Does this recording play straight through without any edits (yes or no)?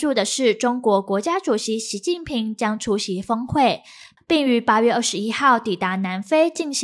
yes